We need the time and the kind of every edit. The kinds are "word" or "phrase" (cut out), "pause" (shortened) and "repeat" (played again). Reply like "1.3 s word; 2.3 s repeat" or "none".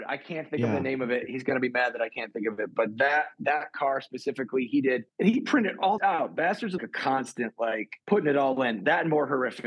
5.1 s pause; 6.0 s word; 6.8 s phrase; 8.0 s pause